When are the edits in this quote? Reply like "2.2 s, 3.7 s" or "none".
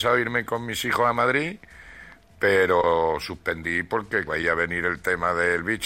4.3 s